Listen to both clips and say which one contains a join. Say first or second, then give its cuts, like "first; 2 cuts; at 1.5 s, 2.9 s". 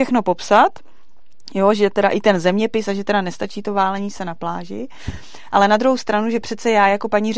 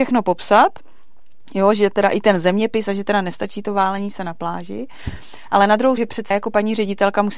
second; 2 cuts; at 6.0 s, 6.3 s